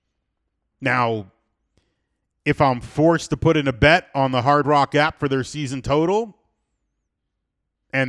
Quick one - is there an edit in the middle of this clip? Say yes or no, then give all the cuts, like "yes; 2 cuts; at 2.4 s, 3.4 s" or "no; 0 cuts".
no; 0 cuts